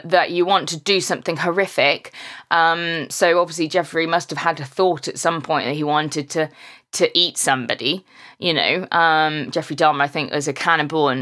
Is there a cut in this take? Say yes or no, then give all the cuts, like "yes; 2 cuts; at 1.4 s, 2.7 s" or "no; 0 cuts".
no; 0 cuts